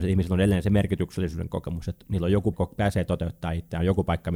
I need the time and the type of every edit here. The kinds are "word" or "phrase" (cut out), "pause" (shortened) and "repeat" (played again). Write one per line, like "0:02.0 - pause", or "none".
0:02.5 - phrase